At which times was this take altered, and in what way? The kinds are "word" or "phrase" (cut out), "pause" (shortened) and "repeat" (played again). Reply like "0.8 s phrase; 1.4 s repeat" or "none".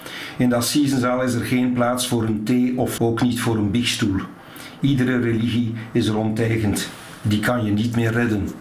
3.0 s word